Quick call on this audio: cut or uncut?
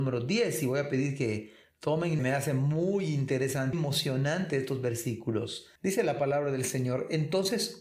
cut